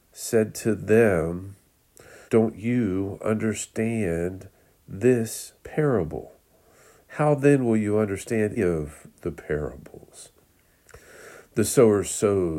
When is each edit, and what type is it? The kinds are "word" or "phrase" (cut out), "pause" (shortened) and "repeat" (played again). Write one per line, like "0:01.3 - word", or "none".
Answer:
0:02.3 - pause
0:05.6 - pause
0:08.6 - word